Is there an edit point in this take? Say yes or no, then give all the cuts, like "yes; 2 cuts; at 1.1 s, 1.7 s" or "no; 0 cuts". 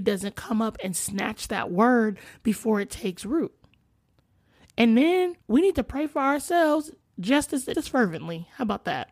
yes; 2 cuts; at 5.4 s, 7.7 s